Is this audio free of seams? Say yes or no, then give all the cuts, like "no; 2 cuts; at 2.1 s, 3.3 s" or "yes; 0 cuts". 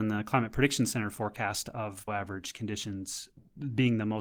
no; 1 cut; at 2.1 s